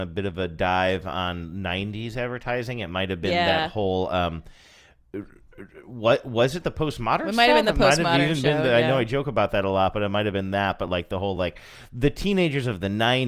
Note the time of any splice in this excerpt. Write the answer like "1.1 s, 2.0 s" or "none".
none